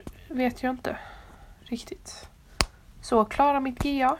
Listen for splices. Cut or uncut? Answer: uncut